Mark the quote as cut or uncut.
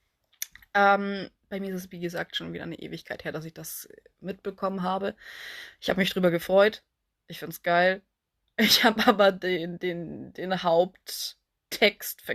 uncut